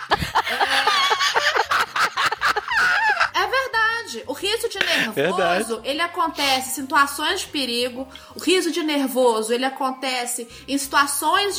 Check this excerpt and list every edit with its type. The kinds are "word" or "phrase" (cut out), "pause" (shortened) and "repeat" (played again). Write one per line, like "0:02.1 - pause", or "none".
none